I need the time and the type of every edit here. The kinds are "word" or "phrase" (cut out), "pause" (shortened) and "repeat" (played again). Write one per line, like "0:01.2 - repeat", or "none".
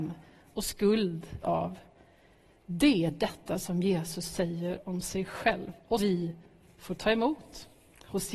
0:01.4 - word
0:06.0 - word